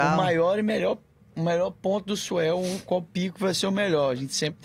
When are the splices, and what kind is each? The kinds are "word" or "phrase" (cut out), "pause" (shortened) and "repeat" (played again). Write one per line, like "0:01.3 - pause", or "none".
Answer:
none